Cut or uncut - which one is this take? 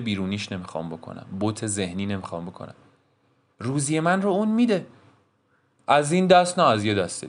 uncut